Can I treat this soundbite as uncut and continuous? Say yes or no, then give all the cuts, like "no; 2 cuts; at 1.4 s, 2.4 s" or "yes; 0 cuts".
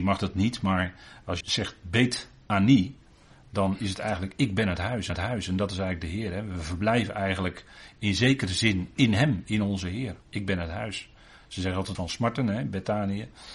no; 4 cuts; at 1.4 s, 5.1 s, 10.2 s, 11.9 s